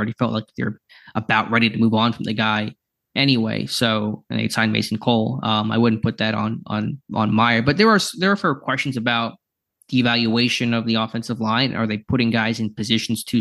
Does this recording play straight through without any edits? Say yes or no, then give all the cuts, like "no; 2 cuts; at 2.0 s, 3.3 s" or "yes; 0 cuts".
yes; 0 cuts